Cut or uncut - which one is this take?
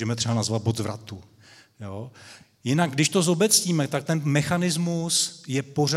uncut